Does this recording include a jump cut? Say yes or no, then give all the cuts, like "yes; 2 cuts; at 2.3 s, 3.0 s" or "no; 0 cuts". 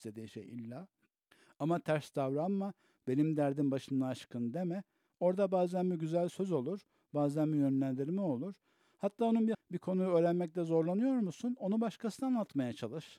yes; 2 cuts; at 1.3 s, 9.5 s